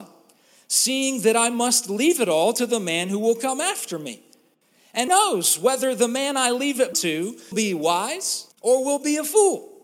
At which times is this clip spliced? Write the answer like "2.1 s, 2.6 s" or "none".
5.1 s, 6.9 s, 7.5 s, 8.5 s